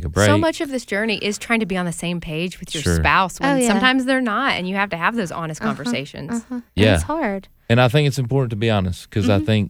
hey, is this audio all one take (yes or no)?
yes